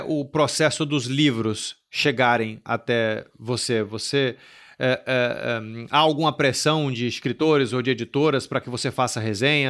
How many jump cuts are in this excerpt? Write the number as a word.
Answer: zero